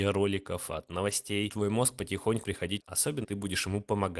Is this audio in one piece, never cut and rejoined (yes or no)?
no